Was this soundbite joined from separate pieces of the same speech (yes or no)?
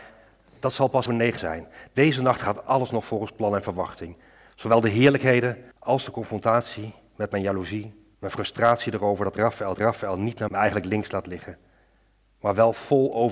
yes